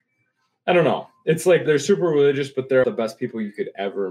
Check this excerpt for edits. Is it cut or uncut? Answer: cut